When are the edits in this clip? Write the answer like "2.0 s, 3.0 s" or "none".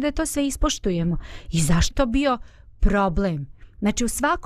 1.9 s